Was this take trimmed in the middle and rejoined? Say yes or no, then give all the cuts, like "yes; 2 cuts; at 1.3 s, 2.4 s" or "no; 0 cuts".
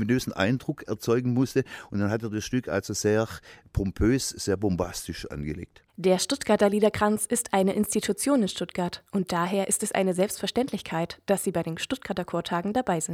yes; 1 cut; at 5.9 s